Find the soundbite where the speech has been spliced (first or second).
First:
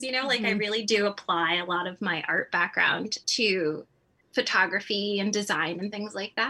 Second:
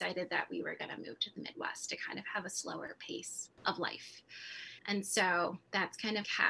second